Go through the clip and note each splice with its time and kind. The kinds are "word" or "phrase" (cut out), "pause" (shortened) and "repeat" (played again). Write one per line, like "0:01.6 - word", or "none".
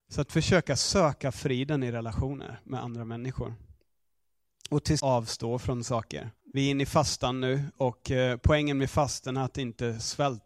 0:05.0 - phrase
0:06.4 - pause